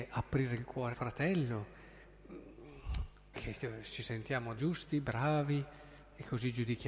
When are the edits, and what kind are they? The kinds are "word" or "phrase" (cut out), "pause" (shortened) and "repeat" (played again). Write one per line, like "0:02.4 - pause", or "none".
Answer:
0:00.9 - word
0:03.3 - word
0:04.6 - word